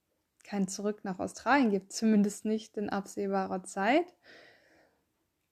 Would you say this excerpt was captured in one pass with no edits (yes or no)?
yes